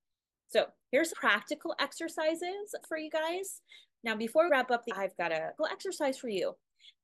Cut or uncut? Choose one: cut